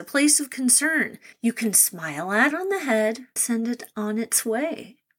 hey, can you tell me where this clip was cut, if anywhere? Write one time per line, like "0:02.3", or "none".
0:01.3
0:02.5
0:03.4